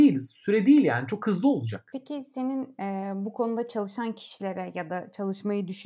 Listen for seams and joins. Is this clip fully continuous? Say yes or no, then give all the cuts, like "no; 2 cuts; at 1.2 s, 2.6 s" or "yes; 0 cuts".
yes; 0 cuts